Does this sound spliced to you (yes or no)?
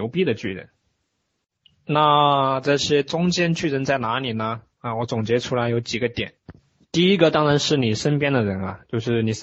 yes